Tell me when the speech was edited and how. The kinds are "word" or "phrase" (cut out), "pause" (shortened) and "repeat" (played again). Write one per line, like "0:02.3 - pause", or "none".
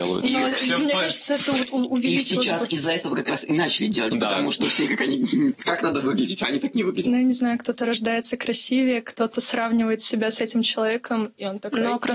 0:04.9 - word
0:05.5 - word